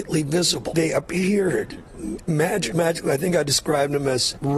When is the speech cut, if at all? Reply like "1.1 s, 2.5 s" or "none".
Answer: 2.7 s